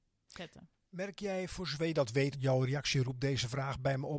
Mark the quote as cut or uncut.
cut